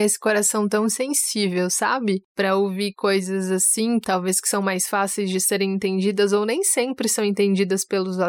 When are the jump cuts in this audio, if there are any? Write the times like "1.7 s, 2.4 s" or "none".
2.3 s